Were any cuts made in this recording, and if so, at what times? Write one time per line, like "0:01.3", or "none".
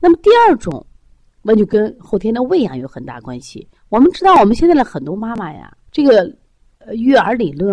0:03.8
0:05.8